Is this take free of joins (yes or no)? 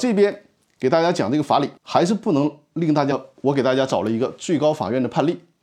no